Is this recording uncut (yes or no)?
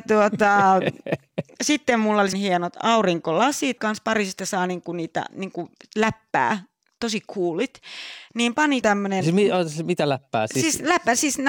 no